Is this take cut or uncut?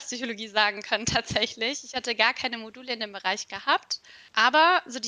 uncut